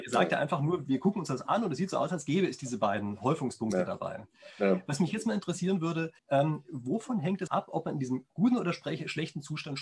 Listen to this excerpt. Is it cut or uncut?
cut